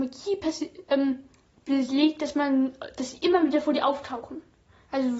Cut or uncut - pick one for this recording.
uncut